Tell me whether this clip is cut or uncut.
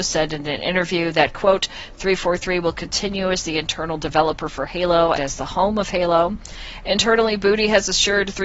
cut